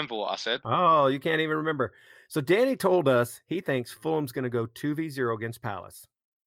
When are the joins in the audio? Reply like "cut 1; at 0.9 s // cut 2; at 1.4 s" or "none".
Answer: none

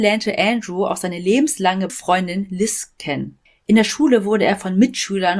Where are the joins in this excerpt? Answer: cut 1; at 1.9 s // cut 2; at 3.0 s // cut 3; at 3.5 s

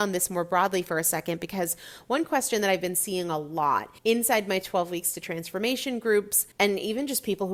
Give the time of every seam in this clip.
cut 1; at 4.0 s // cut 2; at 6.5 s

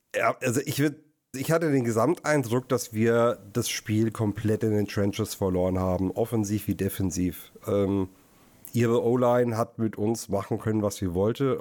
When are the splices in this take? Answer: cut 1; at 1.3 s

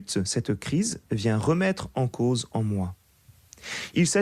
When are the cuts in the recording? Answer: cut 1; at 1.1 s

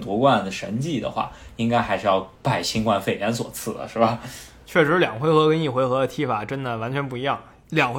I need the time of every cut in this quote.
cut 1; at 2.4 s

